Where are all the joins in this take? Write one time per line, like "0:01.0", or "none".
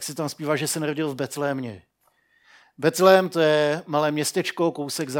none